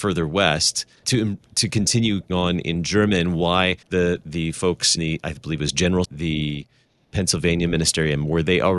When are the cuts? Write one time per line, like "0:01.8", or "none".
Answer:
0:01.0
0:02.3
0:03.8
0:05.0
0:06.0